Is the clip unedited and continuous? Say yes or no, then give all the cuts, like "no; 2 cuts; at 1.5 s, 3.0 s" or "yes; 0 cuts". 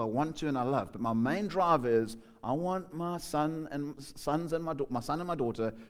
yes; 0 cuts